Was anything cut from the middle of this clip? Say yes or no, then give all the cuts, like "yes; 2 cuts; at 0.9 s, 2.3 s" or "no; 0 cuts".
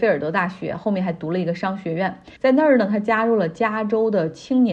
yes; 1 cut; at 2.4 s